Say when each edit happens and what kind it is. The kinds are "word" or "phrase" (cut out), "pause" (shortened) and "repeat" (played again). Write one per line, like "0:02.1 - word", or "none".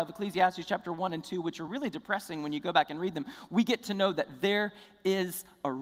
none